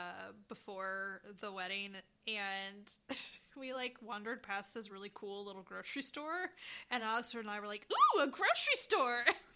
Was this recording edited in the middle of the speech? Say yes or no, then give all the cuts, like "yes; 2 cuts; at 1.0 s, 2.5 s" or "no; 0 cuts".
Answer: no; 0 cuts